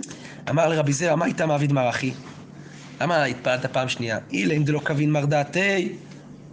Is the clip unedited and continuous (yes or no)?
no